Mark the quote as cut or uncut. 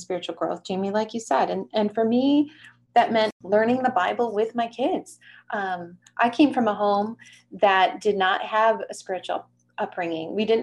uncut